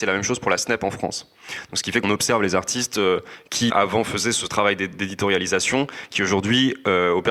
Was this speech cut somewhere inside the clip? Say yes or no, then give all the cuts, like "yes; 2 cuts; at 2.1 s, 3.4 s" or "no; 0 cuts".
yes; 2 cuts; at 2.0 s, 3.7 s